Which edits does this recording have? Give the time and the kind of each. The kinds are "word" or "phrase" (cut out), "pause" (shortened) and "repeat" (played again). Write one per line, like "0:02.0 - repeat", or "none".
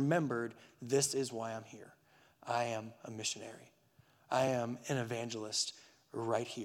none